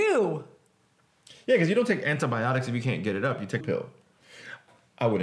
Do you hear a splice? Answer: yes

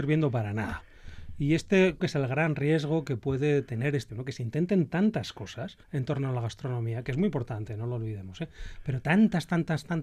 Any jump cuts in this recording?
yes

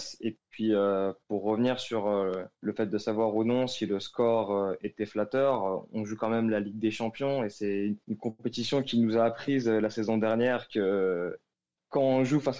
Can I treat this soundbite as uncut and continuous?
no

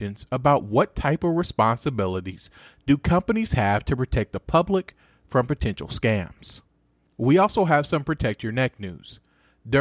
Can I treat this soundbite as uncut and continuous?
yes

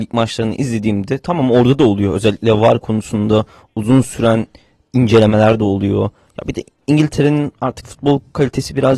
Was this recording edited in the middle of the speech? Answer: no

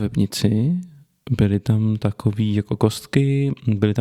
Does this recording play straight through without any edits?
yes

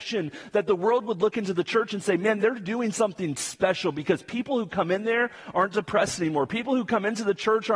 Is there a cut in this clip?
no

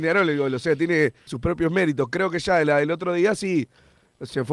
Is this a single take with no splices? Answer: no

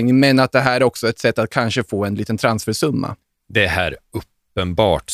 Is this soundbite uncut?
yes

